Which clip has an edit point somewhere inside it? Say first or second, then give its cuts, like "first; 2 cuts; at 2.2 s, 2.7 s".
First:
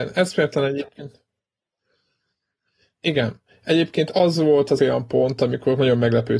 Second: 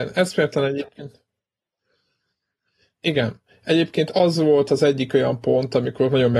first; 1 cut; at 4.8 s